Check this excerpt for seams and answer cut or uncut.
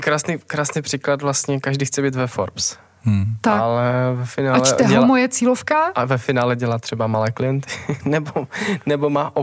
uncut